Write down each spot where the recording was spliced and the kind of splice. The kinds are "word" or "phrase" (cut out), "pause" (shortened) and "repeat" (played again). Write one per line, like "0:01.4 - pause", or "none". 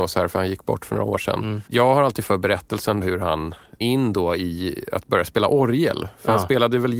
0:01.7 - pause
0:02.3 - word
0:03.0 - word
0:03.8 - word

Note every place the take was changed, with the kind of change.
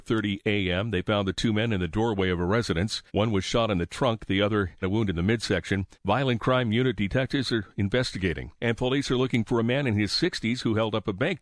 0:03.1 - pause
0:04.8 - word
0:05.9 - pause
0:08.6 - pause

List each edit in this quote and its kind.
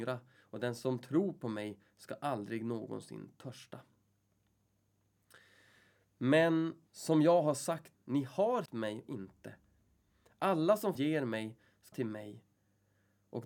0:06.9 - pause
0:07.9 - word
0:08.7 - word
0:09.1 - phrase
0:11.0 - word
0:11.9 - word

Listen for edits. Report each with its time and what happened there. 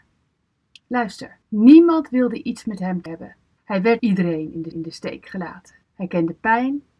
0:01.4 - pause
0:03.1 - word
0:03.6 - pause
0:04.0 - word
0:04.7 - repeat
0:05.8 - pause

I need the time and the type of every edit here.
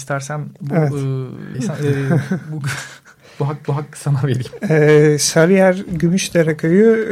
0:01.5 - phrase
0:03.6 - repeat

